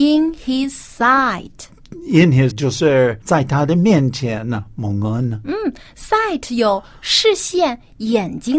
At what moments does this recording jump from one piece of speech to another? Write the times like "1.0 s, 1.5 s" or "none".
2.5 s, 3.2 s